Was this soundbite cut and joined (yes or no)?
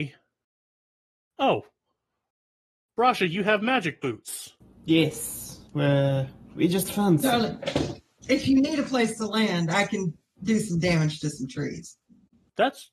yes